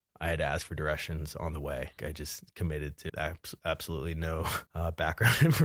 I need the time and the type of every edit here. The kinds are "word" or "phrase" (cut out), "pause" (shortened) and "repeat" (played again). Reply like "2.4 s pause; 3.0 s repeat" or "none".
2.0 s word; 3.1 s phrase; 4.7 s pause